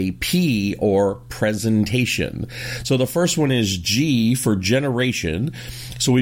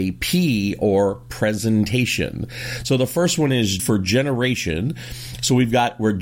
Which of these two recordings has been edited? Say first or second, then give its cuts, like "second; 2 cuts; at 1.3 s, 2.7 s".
second; 1 cut; at 3.8 s